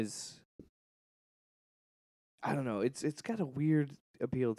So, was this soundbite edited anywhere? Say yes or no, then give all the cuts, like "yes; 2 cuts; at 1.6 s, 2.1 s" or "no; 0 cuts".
no; 0 cuts